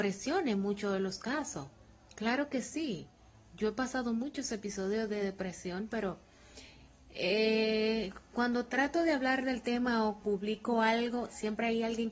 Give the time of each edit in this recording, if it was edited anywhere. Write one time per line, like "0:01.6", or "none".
0:10.2